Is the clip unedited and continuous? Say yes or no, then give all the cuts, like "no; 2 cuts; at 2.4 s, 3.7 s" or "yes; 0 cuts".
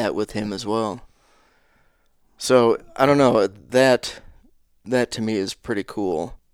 yes; 0 cuts